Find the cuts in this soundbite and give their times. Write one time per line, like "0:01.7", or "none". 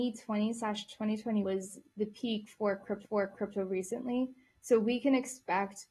0:01.4
0:03.0